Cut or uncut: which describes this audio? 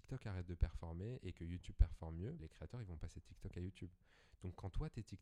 cut